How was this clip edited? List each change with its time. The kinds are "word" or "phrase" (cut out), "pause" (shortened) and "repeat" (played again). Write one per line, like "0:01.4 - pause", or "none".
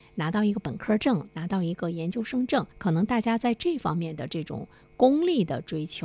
0:02.7 - pause